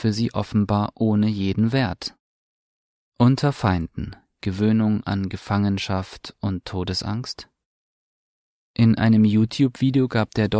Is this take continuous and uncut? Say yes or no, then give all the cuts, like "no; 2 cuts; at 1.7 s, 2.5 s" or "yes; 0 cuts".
yes; 0 cuts